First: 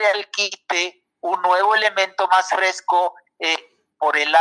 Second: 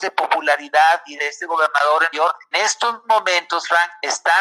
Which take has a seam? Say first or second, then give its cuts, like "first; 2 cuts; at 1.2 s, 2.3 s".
second; 3 cuts; at 1.2 s, 2.1 s, 2.5 s